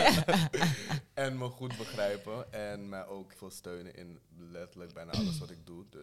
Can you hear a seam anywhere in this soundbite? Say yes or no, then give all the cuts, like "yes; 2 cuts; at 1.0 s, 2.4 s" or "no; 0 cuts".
yes; 1 cut; at 3.3 s